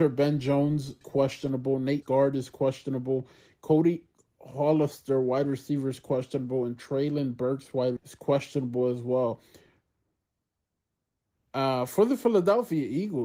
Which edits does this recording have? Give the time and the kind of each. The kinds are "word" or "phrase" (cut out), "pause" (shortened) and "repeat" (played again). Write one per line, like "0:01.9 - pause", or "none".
0:01.0 - word
0:02.0 - word
0:08.0 - word